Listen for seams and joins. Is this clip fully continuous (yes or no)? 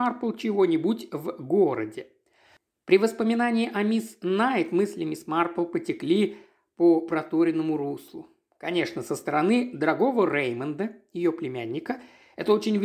yes